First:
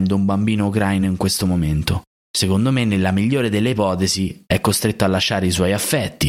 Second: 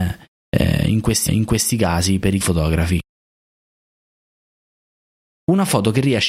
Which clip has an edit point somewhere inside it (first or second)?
second